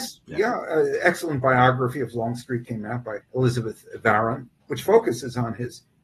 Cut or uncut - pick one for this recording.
cut